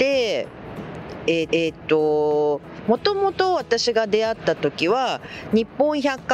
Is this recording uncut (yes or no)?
no